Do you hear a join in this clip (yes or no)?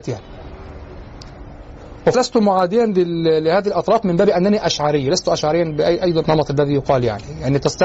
yes